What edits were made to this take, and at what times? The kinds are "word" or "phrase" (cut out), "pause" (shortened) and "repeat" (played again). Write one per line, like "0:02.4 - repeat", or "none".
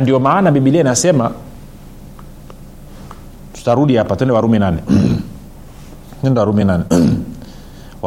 none